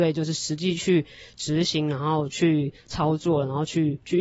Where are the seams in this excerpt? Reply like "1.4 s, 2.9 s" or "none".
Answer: none